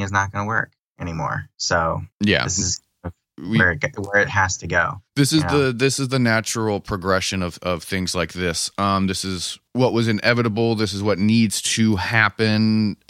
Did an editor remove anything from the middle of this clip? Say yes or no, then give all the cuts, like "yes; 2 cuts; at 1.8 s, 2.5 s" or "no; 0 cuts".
yes; 3 cuts; at 2.1 s, 5.1 s, 9.7 s